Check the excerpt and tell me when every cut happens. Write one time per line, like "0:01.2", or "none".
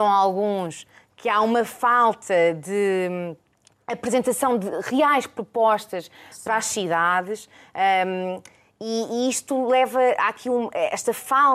none